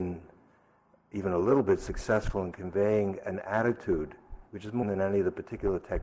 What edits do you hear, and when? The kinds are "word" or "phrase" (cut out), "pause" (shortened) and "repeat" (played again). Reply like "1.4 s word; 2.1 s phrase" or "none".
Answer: 4.5 s pause; 4.8 s word